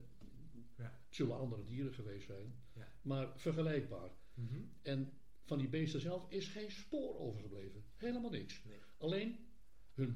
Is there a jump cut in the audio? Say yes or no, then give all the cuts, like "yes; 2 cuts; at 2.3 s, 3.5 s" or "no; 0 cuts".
no; 0 cuts